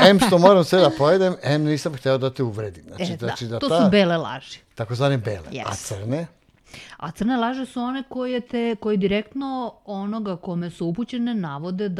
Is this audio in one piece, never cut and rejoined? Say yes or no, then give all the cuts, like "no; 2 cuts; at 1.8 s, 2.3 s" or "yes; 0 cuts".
yes; 0 cuts